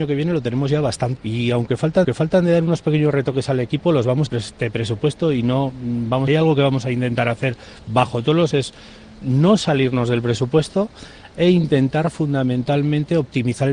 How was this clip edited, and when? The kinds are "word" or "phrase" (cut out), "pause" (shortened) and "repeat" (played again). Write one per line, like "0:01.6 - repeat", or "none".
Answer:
0:01.2 - word
0:02.0 - repeat
0:04.3 - phrase
0:06.3 - phrase
0:08.5 - word
0:09.2 - word